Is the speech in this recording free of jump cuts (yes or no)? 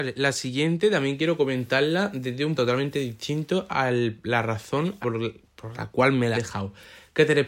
no